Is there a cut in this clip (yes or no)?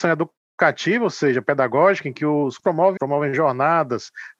yes